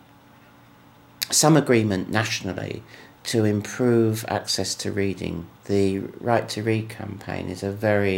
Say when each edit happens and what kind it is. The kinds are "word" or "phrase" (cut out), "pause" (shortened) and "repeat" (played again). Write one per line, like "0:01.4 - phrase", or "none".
0:05.6 - pause